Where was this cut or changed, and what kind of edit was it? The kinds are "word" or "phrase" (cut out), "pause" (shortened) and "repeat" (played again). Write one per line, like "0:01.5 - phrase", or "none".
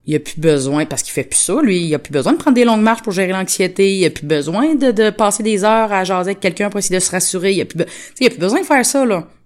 none